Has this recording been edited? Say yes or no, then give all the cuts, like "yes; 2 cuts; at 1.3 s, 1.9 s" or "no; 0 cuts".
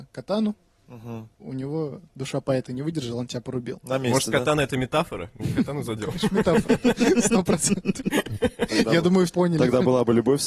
yes; 3 cuts; at 1.3 s, 5.4 s, 9.3 s